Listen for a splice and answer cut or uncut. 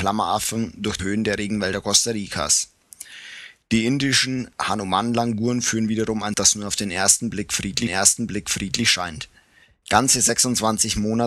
cut